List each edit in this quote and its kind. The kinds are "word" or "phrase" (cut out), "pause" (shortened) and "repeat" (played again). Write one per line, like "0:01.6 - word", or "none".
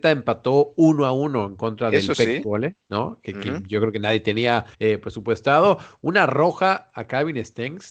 0:04.7 - pause